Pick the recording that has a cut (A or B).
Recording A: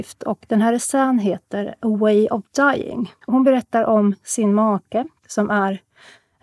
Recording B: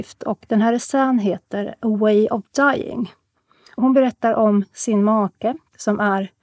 A